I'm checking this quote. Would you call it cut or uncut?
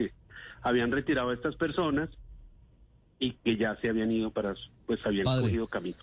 uncut